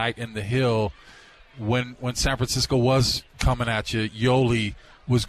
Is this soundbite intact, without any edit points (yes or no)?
yes